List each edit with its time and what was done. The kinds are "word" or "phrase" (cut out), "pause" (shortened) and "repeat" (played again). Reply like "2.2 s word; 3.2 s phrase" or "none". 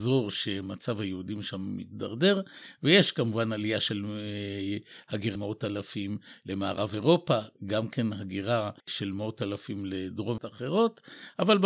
5.4 s word; 8.8 s pause; 10.4 s phrase